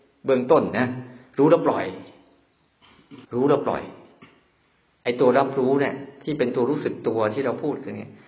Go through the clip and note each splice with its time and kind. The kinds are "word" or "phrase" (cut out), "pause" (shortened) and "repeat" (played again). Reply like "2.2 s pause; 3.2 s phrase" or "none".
3.2 s pause